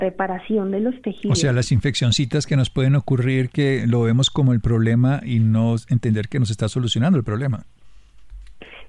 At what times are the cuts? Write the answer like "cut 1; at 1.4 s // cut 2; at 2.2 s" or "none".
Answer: none